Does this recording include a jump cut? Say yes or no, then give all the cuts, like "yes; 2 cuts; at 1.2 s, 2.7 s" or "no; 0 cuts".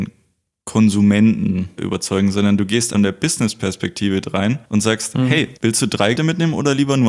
yes; 5 cuts; at 1.8 s, 2.9 s, 4.6 s, 5.6 s, 6.2 s